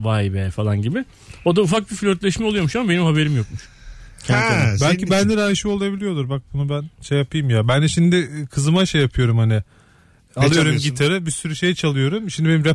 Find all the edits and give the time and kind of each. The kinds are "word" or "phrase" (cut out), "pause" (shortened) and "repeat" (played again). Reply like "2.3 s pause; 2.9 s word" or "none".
none